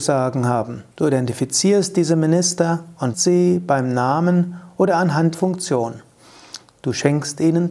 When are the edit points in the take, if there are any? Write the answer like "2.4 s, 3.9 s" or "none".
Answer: 0.9 s, 3.1 s, 5.3 s